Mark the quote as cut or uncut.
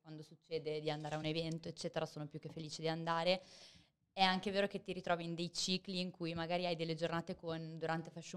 uncut